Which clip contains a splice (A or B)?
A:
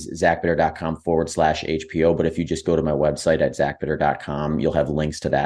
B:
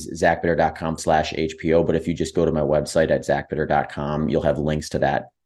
B